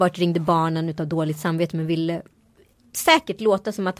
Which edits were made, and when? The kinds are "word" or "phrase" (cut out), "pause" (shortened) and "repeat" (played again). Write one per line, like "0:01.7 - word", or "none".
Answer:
none